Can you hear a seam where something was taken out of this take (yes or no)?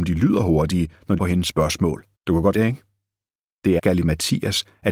yes